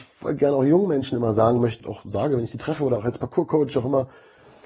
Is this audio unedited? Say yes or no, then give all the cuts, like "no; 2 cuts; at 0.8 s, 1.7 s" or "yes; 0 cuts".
no; 1 cut; at 1.8 s